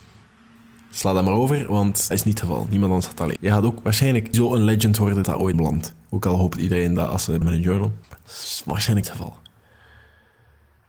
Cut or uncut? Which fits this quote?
cut